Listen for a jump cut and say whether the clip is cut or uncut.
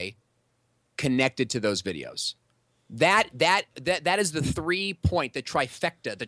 uncut